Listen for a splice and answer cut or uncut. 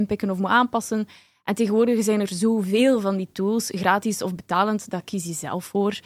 uncut